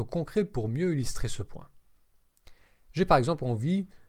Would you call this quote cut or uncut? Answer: uncut